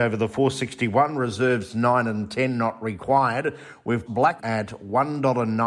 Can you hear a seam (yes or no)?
yes